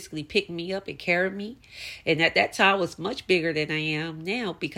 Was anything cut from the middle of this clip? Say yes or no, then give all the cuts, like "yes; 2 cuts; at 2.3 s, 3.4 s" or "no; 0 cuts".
no; 0 cuts